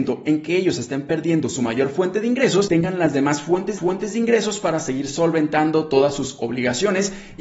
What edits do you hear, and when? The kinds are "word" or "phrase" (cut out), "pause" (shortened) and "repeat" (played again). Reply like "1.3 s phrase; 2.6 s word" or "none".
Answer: 3.8 s repeat